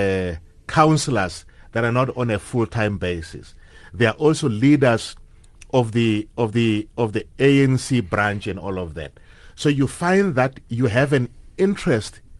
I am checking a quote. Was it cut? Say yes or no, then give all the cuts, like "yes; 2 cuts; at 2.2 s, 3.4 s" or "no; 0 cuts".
yes; 1 cut; at 6.5 s